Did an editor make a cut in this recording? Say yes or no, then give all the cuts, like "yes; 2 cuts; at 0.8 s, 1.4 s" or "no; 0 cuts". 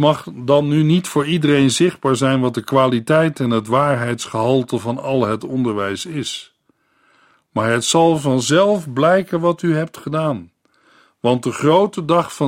no; 0 cuts